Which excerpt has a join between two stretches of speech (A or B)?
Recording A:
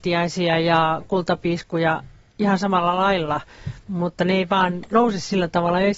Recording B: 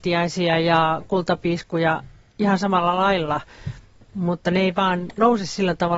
A